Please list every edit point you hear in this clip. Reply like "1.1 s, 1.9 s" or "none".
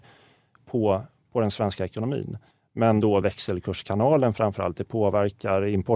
2.5 s, 3.2 s